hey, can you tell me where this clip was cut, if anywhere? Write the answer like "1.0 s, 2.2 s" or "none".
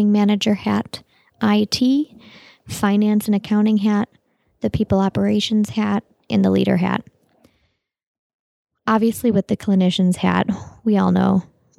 none